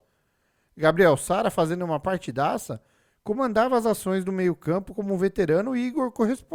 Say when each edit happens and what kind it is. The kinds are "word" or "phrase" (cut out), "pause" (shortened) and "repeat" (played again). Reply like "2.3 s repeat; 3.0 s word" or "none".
none